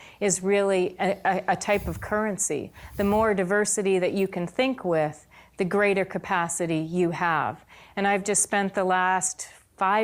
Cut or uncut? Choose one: uncut